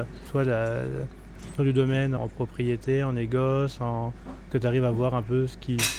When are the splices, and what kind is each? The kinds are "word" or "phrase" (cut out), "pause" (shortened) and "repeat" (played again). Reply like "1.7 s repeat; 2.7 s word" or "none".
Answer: 1.6 s word; 2.2 s word; 4.5 s word